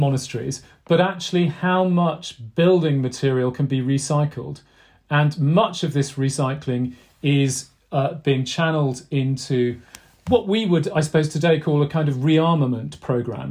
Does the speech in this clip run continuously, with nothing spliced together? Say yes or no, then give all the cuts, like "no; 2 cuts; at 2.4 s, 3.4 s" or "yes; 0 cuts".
yes; 0 cuts